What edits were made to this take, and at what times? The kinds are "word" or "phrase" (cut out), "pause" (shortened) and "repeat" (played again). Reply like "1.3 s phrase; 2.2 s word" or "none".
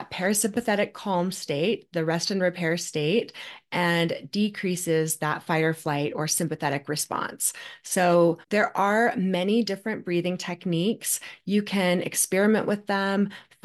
8.4 s pause